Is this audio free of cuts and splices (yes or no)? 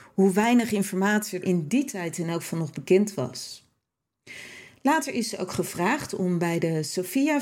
no